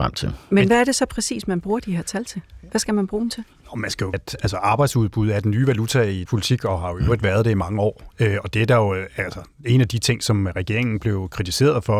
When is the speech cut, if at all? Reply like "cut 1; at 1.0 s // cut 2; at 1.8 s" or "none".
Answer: cut 1; at 4.1 s // cut 2; at 6.3 s